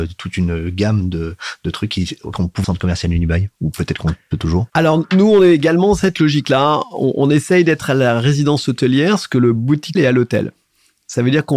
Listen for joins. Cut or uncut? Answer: cut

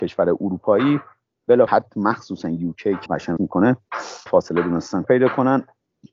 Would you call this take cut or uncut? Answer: cut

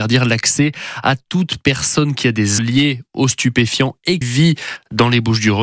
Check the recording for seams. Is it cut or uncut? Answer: cut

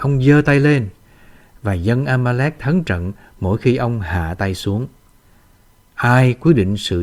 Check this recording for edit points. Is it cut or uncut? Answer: uncut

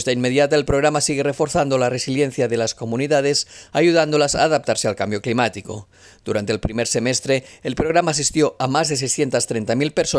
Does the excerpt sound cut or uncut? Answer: uncut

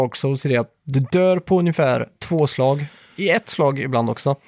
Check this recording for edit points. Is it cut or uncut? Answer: uncut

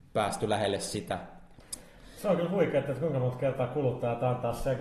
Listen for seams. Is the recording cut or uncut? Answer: uncut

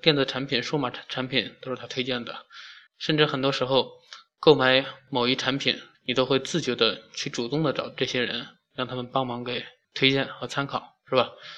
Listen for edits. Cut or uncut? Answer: cut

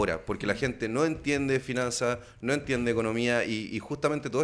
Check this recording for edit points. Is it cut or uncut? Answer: uncut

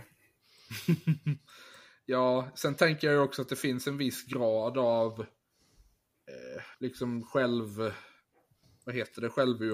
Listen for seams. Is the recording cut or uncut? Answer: cut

